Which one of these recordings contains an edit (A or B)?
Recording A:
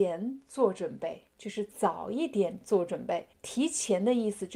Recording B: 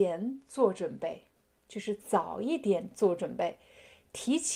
A